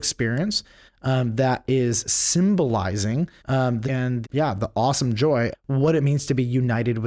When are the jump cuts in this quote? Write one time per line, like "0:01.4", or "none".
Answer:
0:03.4
0:03.8
0:04.2
0:05.5

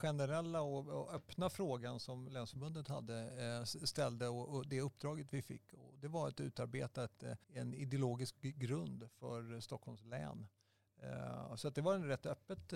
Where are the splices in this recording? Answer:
0:07.4

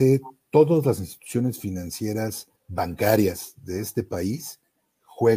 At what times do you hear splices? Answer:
0:02.6

